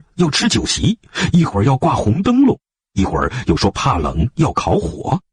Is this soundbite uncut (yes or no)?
yes